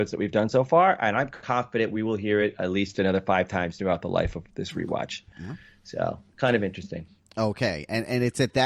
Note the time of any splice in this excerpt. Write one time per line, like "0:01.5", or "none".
none